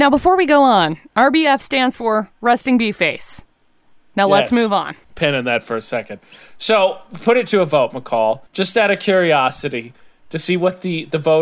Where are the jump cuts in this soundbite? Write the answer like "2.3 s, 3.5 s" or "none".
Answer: 5.0 s, 8.5 s